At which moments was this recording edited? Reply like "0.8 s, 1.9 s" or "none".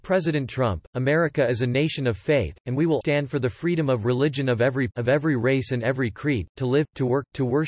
3.0 s, 4.9 s